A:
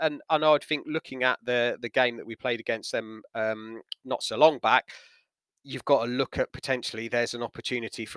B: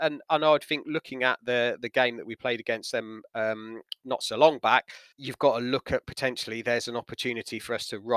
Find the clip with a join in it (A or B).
B